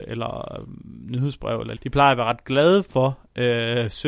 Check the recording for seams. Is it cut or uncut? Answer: cut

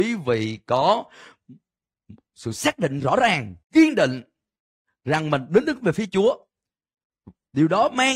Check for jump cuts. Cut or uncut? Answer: cut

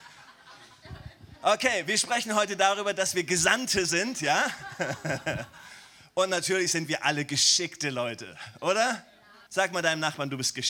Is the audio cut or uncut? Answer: cut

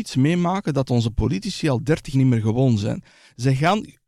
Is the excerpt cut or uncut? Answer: cut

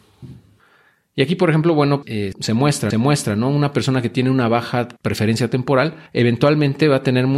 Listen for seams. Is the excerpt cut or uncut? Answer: cut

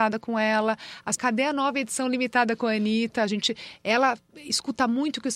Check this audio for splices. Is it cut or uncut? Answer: cut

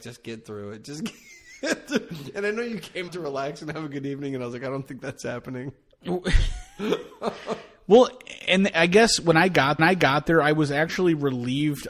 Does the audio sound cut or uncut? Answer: cut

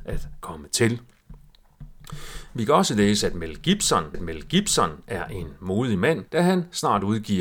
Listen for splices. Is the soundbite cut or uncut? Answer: cut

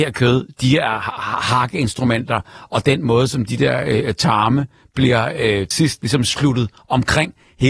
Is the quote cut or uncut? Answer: cut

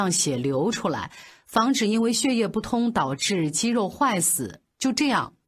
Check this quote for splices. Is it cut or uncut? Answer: uncut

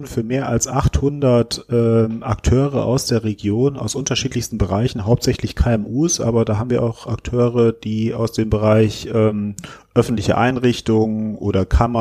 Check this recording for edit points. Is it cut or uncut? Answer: uncut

